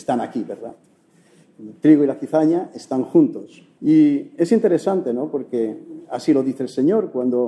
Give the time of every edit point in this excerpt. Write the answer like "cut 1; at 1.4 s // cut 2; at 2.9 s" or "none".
cut 1; at 3.7 s